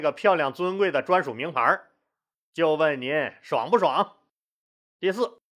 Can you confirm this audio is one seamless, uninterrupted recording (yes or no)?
yes